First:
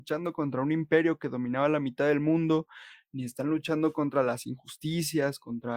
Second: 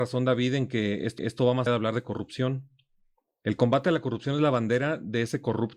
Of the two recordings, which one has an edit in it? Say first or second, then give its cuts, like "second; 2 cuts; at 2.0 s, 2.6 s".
second; 2 cuts; at 1.2 s, 1.7 s